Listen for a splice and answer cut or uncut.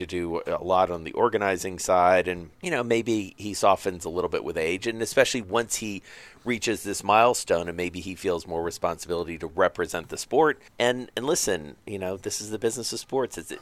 cut